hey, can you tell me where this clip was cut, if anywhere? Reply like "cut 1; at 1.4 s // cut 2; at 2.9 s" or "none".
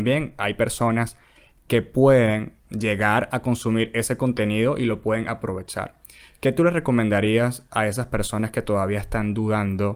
cut 1; at 2.6 s